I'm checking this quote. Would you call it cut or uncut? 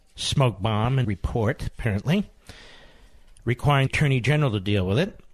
cut